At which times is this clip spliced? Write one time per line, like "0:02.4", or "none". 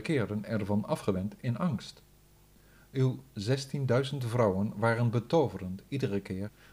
0:02.4

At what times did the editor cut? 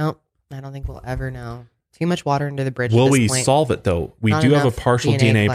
none

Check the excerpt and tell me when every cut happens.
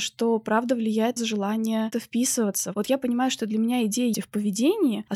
0:01.2
0:01.9
0:04.1

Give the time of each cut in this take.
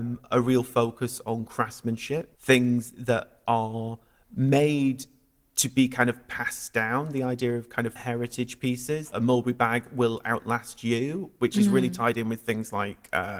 0:02.3
0:08.0
0:09.1

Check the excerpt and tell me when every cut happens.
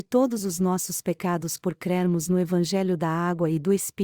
none

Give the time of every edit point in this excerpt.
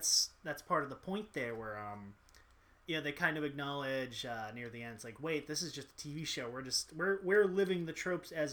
none

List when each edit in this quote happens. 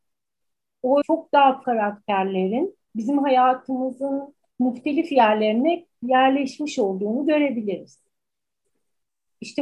0:01.0
0:01.6
0:02.8
0:04.5

